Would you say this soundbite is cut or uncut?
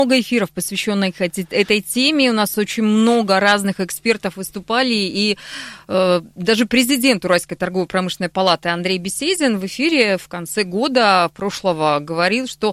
uncut